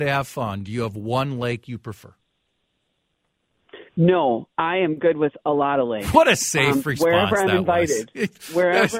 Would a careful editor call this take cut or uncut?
cut